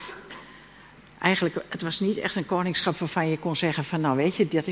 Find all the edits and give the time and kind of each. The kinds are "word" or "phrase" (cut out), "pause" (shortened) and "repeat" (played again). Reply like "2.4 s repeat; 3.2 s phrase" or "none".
none